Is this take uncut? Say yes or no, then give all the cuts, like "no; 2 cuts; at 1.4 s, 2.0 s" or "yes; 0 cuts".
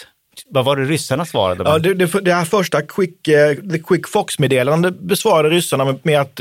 yes; 0 cuts